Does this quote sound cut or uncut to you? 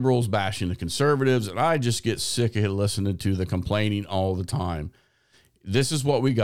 uncut